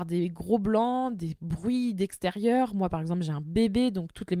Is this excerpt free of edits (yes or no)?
yes